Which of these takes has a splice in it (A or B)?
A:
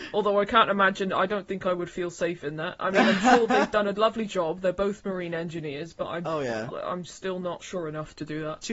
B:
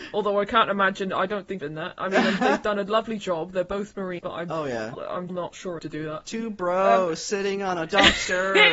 B